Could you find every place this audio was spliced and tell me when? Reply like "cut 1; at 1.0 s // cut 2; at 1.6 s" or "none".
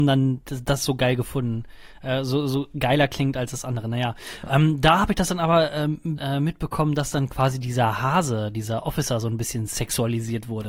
cut 1; at 6.2 s